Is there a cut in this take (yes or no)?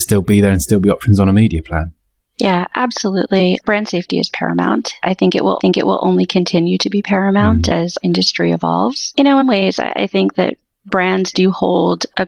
yes